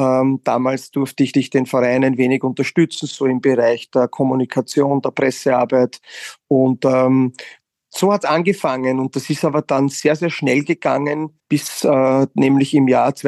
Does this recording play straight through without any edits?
no; 2 cuts; at 1.3 s, 11.4 s

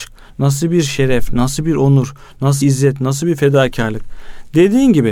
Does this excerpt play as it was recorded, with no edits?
no; 1 cut; at 2.6 s

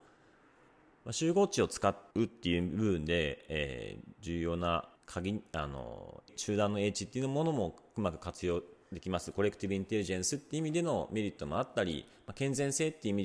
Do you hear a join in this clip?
yes; 3 cuts; at 2.1 s, 5.0 s, 6.3 s

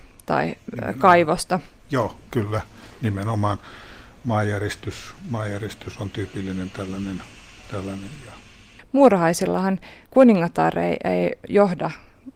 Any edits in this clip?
no; 0 cuts

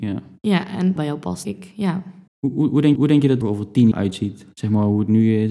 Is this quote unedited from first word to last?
no; 6 cuts; at 1.0 s, 1.4 s, 2.3 s, 3.0 s, 3.4 s, 3.9 s

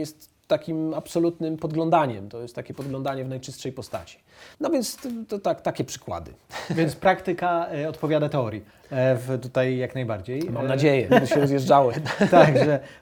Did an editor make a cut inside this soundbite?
yes; 2 cuts; at 4.5 s, 11.1 s

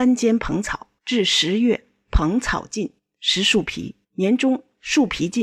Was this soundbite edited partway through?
yes; 3 cuts; at 1.0 s, 3.0 s, 4.0 s

